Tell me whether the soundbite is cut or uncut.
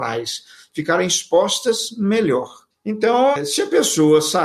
cut